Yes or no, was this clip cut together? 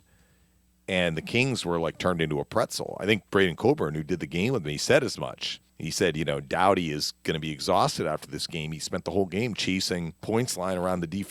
yes